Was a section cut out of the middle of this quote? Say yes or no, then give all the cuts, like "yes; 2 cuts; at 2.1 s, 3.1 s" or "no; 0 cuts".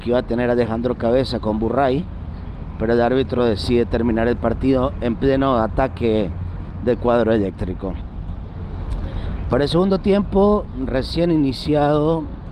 no; 0 cuts